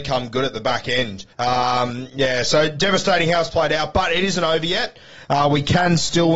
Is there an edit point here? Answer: yes; 1 cut; at 1.3 s

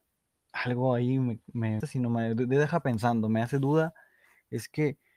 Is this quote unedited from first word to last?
no; 1 cut; at 1.8 s

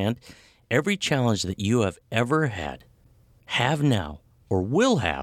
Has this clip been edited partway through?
no; 0 cuts

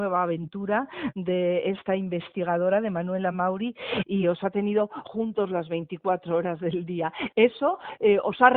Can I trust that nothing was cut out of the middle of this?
yes; 0 cuts

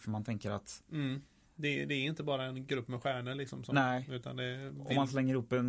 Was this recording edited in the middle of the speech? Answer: no; 0 cuts

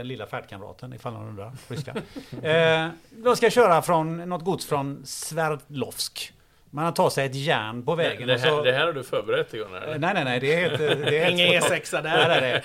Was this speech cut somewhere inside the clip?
no; 0 cuts

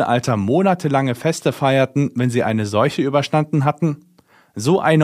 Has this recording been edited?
no; 0 cuts

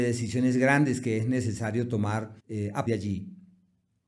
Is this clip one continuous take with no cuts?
no; 2 cuts; at 2.4 s, 2.9 s

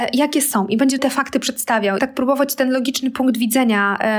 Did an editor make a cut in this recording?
yes; 2 cuts; at 1.0 s, 2.0 s

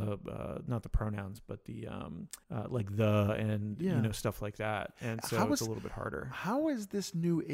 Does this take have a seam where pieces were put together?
yes; 1 cut; at 2.4 s

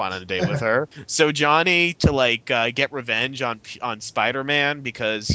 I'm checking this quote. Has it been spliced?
no; 0 cuts

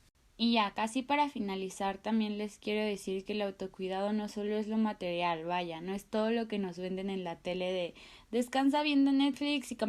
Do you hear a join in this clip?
no; 0 cuts

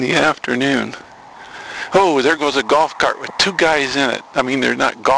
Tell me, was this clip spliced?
no; 0 cuts

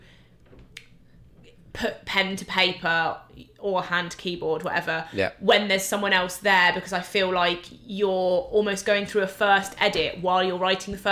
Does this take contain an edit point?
no; 0 cuts

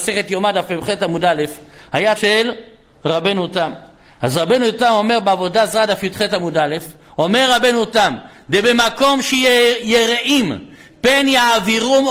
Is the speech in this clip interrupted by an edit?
yes; 1 cut; at 2.2 s

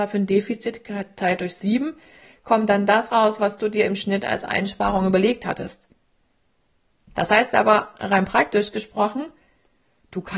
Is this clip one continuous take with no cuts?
yes; 0 cuts

